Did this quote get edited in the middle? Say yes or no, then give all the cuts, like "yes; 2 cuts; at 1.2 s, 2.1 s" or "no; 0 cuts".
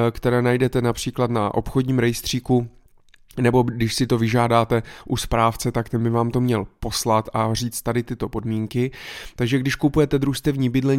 no; 0 cuts